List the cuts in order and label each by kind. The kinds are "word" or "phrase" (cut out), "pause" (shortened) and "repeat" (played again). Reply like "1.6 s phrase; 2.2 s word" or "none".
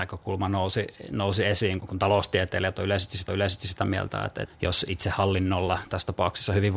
1.8 s word; 3.3 s repeat; 4.4 s word